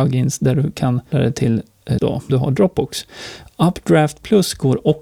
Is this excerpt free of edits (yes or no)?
no